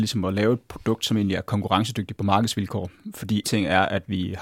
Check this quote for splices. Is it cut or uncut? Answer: cut